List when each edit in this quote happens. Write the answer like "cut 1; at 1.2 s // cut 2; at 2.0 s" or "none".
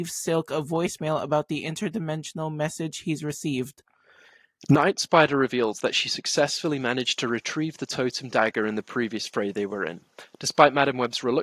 none